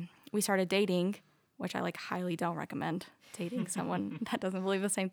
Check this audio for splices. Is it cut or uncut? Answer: uncut